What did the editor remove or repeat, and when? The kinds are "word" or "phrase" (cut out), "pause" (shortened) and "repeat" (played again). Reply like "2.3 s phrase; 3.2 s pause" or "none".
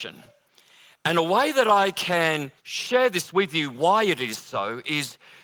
2.6 s pause

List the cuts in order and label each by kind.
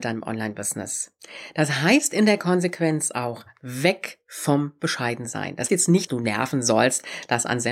5.7 s word; 6.1 s word

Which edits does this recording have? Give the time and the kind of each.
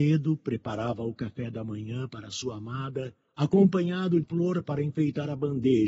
4.2 s word

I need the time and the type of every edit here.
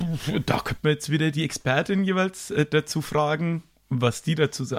none

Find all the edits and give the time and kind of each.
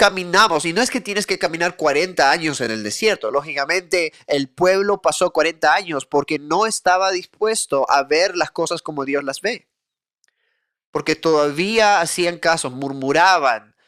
none

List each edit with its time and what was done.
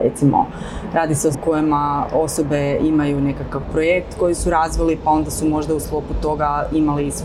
1.3 s word

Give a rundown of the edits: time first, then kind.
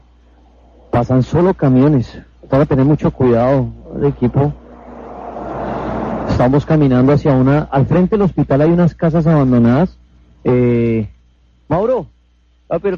3.8 s pause; 10.1 s pause

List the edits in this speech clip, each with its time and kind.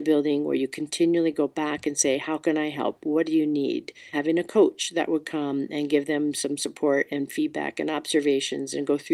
4.1 s word

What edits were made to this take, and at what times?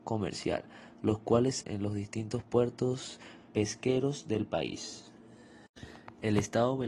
1.6 s word; 3.5 s word

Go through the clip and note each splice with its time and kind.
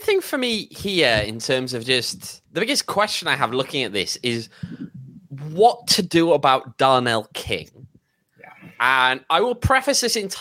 2.4 s pause

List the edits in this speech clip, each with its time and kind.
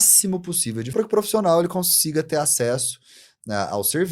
0.9 s word

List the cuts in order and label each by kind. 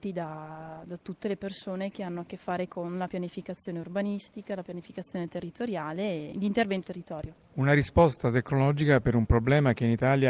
6.8 s word

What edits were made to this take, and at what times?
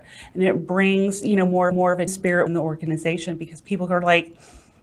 1.7 s repeat; 2.1 s word; 2.5 s word

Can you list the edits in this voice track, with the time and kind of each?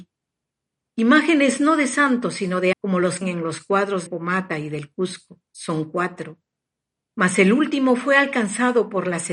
2.7 s word; 3.2 s phrase; 4.1 s word; 5.5 s pause

